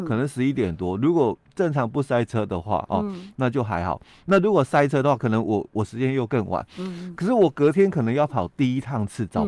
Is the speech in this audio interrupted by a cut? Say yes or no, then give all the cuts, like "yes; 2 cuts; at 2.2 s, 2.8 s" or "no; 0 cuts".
no; 0 cuts